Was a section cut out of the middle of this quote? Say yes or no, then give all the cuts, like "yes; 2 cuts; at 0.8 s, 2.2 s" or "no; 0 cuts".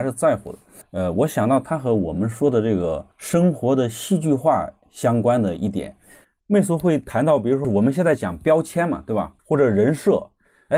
yes; 3 cuts; at 3.1 s, 7.6 s, 9.4 s